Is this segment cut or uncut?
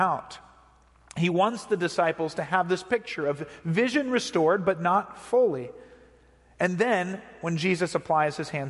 uncut